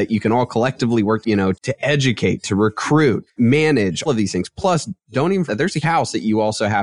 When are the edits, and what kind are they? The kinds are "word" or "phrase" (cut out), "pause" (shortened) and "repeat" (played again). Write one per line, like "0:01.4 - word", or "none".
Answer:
0:01.2 - phrase
0:01.5 - word
0:03.3 - word
0:04.1 - word
0:05.5 - word
0:05.8 - word